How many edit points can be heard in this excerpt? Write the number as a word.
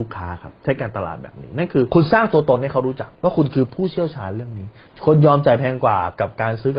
one